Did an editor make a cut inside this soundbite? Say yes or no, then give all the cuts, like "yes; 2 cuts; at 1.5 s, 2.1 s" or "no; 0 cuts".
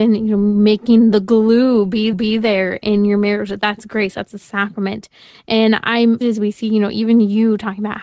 yes; 2 cuts; at 2.1 s, 6.2 s